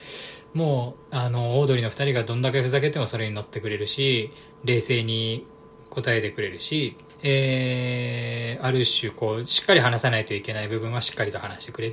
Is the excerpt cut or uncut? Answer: cut